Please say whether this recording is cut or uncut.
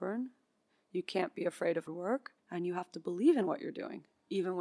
cut